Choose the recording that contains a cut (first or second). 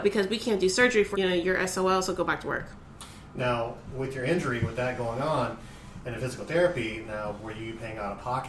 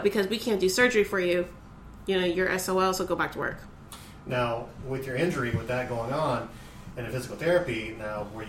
first